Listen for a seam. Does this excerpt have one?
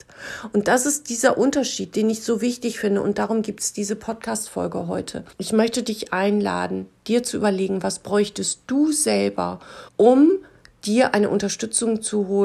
yes; 2 cuts; at 5.3 s, 9.9 s

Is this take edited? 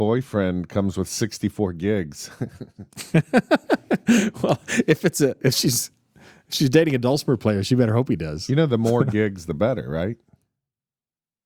no; 0 cuts

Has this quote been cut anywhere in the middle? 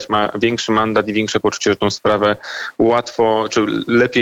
no; 0 cuts

